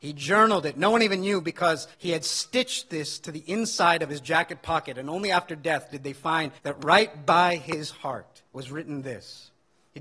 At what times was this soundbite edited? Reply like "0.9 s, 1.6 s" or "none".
1.9 s, 6.6 s, 8.5 s